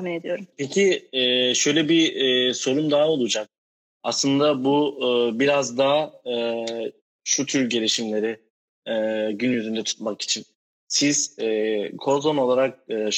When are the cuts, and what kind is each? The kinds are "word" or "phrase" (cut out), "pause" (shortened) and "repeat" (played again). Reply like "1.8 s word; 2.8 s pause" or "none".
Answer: none

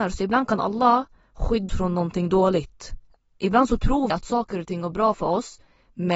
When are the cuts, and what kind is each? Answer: 1.7 s word; 4.1 s word

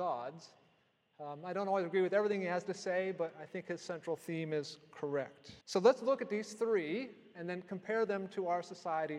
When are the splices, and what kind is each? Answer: 5.6 s pause

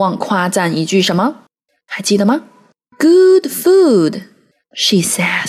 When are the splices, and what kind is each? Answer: none

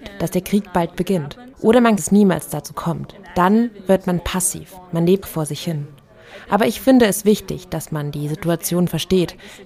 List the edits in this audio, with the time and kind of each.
1.5 s pause; 2.0 s phrase; 5.2 s word

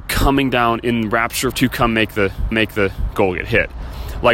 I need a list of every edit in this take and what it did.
1.5 s word; 2.5 s repeat

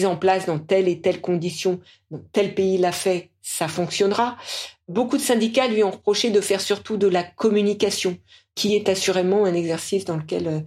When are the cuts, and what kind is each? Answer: none

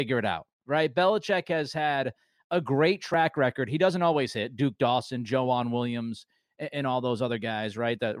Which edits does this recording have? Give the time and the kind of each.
none

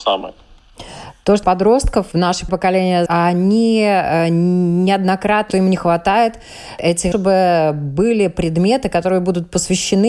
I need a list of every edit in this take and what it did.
1.4 s word; 2.1 s word; 2.5 s word; 3.1 s word; 5.5 s phrase; 7.1 s phrase

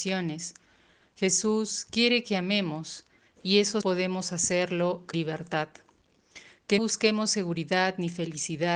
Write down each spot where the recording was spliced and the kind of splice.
3.8 s word; 5.1 s word; 6.8 s word

